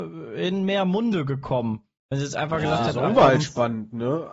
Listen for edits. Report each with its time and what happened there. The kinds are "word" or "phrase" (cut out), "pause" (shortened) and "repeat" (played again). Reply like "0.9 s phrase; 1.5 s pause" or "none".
none